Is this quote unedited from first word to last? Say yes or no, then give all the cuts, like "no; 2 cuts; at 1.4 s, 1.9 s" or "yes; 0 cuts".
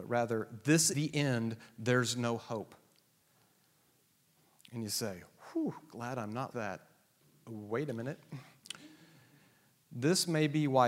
no; 2 cuts; at 0.9 s, 6.5 s